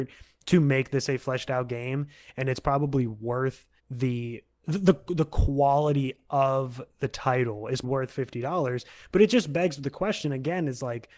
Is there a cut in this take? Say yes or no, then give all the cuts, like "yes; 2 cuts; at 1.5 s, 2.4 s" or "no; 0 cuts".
yes; 2 cuts; at 3.8 s, 7.8 s